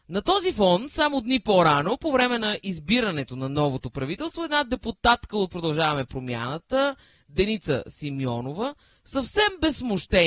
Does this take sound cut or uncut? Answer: uncut